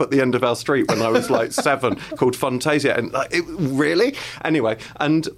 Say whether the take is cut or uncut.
uncut